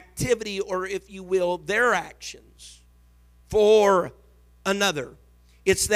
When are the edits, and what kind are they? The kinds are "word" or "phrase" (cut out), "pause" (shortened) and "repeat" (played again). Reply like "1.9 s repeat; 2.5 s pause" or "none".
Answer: none